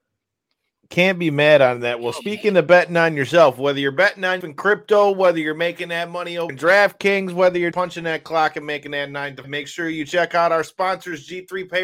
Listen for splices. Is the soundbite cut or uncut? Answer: cut